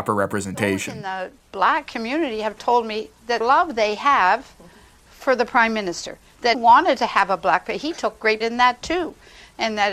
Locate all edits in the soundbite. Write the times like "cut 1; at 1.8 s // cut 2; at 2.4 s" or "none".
cut 1; at 3.4 s // cut 2; at 6.5 s // cut 3; at 8.4 s

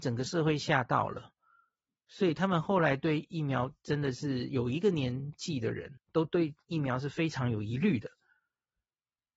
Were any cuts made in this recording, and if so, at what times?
cut 1; at 6.0 s

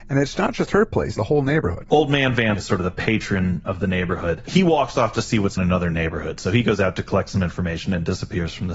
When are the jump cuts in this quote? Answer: cut 1; at 1.1 s // cut 2; at 2.5 s // cut 3; at 5.6 s

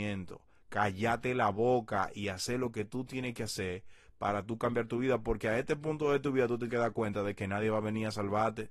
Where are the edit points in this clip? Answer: cut 1; at 6.7 s

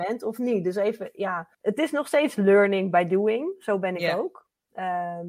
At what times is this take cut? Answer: cut 1; at 1.5 s

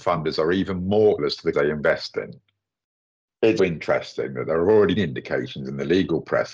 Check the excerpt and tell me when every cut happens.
cut 1; at 1.2 s // cut 2; at 1.5 s // cut 3; at 3.6 s // cut 4; at 5.0 s

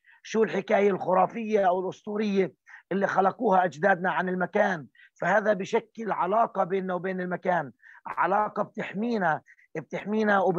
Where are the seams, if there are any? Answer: none

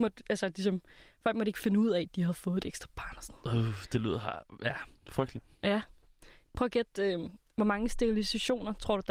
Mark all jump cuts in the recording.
none

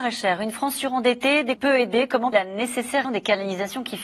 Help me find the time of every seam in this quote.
cut 1; at 1.6 s // cut 2; at 2.3 s // cut 3; at 3.0 s

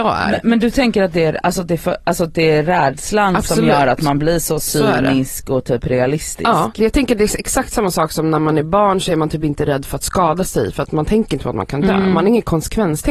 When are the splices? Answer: none

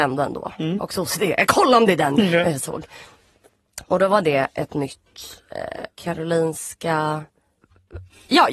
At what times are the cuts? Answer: cut 1; at 2.2 s // cut 2; at 5.9 s

